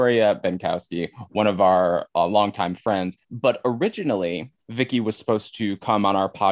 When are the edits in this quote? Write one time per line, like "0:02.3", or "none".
0:03.2
0:04.6